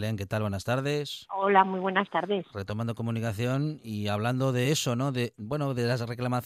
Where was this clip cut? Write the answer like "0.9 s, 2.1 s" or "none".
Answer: none